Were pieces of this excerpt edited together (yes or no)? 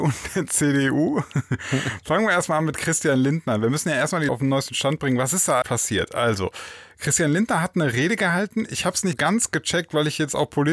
yes